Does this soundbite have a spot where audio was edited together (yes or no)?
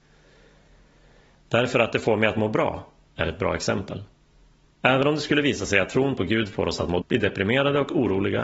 yes